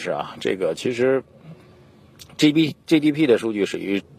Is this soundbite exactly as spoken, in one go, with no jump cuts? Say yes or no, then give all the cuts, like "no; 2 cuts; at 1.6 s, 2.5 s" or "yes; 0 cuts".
yes; 0 cuts